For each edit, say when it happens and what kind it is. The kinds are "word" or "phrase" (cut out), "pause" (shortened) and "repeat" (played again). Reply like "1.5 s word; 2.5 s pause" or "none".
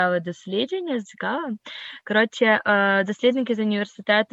1.0 s phrase